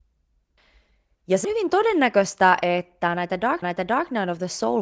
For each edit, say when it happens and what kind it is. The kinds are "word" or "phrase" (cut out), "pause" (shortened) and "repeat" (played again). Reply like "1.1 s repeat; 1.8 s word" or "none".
1.4 s word; 3.6 s repeat